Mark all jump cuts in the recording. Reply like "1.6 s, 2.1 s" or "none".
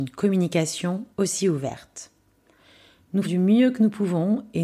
1.1 s, 3.2 s